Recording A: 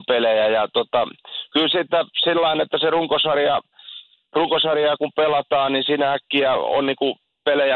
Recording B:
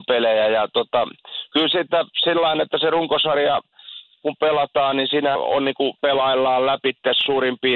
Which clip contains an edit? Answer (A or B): B